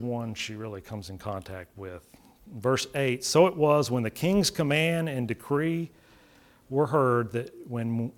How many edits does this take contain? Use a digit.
0